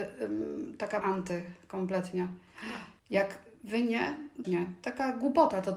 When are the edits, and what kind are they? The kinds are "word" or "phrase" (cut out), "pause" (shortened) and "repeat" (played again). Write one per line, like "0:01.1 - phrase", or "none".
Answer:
0:01.0 - word
0:03.0 - pause
0:04.4 - phrase